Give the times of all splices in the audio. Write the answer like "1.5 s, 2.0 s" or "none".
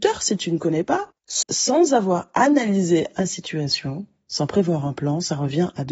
1.4 s, 3.2 s